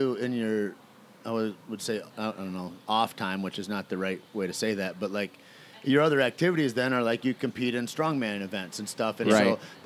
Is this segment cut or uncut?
uncut